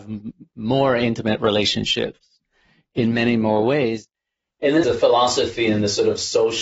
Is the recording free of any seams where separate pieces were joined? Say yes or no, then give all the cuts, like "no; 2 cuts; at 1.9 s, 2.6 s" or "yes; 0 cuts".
no; 1 cut; at 4.8 s